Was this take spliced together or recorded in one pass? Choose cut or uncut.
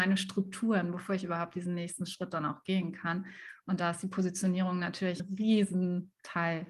cut